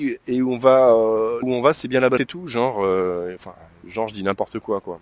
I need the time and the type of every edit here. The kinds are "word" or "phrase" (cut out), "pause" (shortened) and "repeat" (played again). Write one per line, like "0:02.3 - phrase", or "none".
0:01.4 - word
0:02.2 - word
0:03.8 - word